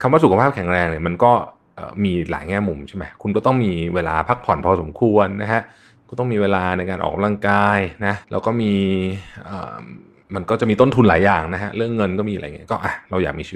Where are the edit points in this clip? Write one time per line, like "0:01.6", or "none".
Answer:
0:08.2

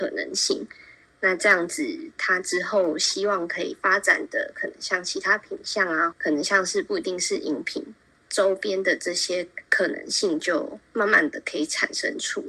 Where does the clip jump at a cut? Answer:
0:06.1
0:09.6

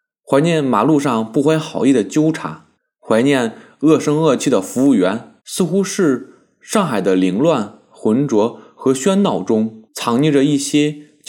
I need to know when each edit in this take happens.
0:02.7
0:05.4
0:09.9

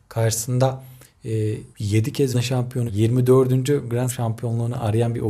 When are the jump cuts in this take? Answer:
0:01.7
0:02.3
0:02.9
0:04.1

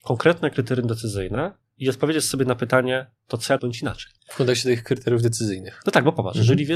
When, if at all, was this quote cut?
0:01.6
0:03.6
0:04.2

